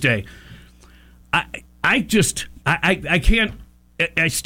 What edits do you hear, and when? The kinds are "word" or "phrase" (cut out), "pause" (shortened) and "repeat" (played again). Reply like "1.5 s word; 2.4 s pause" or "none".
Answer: 1.6 s pause; 2.6 s pause